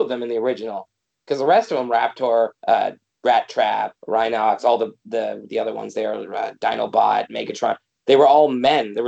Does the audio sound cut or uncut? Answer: cut